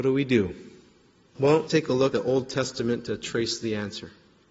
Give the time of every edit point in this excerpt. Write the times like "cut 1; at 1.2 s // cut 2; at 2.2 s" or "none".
cut 1; at 1.7 s // cut 2; at 2.1 s